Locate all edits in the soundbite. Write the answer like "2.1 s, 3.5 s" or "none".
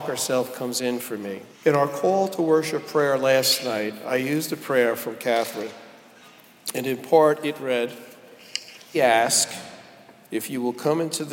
1.5 s, 8.9 s

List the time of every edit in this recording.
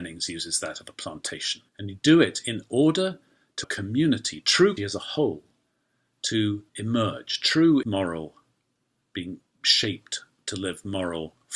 1.7 s, 3.6 s, 4.8 s, 6.7 s, 7.8 s

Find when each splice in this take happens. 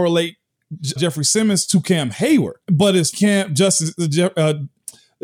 1.0 s, 2.6 s, 3.1 s

